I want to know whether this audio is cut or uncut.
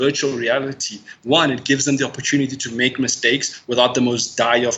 uncut